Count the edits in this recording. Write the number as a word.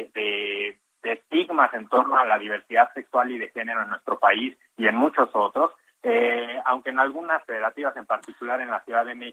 one